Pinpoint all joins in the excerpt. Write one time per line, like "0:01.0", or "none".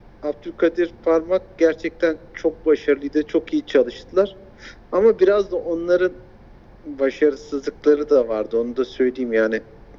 none